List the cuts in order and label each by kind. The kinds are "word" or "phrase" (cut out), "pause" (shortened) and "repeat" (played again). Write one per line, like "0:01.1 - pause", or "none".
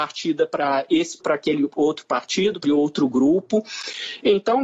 0:01.2 - word
0:02.6 - word